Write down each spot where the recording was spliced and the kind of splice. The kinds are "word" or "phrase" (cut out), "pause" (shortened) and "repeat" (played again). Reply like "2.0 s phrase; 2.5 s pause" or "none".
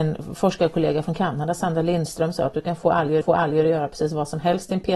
3.2 s repeat